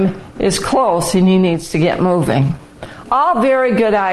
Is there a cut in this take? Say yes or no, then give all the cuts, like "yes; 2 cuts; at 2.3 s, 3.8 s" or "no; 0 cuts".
no; 0 cuts